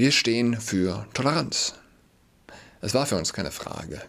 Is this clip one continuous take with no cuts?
yes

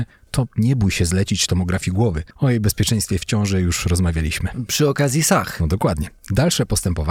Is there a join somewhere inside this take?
yes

